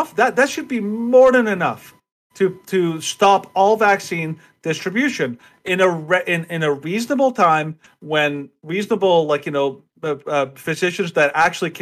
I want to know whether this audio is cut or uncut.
uncut